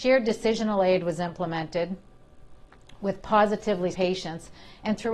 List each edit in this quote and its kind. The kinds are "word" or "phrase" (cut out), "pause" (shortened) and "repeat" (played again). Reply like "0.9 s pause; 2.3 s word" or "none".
3.9 s word